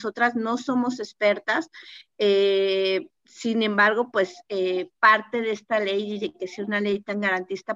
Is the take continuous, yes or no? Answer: no